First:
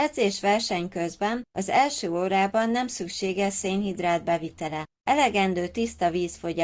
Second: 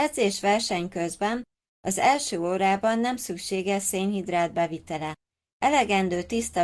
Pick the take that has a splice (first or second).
first